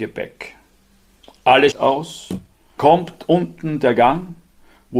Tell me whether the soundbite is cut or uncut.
cut